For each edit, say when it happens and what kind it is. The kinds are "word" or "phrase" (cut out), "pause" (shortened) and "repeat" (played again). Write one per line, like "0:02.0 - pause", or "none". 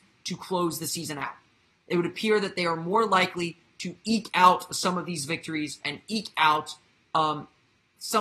none